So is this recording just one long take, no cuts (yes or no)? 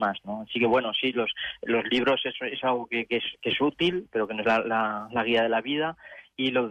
yes